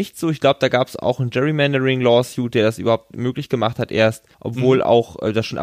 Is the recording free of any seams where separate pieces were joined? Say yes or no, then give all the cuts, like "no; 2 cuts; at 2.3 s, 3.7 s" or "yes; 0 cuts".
no; 1 cut; at 4.3 s